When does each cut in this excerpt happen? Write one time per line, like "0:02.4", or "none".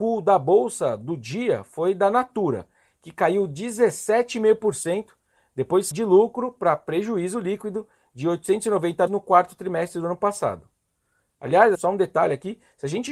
0:05.9
0:09.1
0:11.7